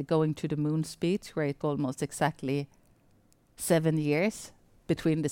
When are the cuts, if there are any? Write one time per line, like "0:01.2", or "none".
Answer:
0:01.6